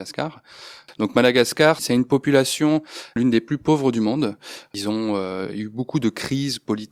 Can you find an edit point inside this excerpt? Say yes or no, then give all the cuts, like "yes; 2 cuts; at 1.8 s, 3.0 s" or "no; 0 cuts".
no; 0 cuts